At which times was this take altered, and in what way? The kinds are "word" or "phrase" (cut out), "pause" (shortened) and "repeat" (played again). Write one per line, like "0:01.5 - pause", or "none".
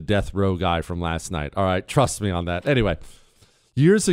none